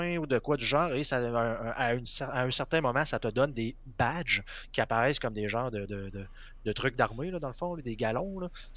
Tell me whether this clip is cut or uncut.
uncut